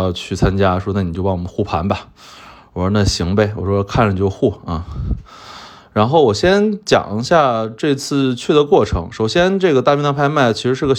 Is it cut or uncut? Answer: uncut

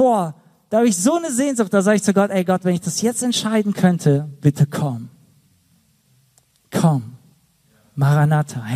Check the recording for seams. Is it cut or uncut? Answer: uncut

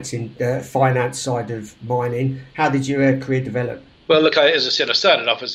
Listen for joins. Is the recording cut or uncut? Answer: uncut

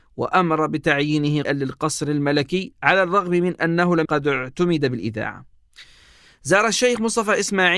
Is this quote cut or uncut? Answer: cut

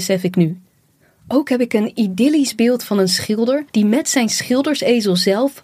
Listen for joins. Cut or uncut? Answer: cut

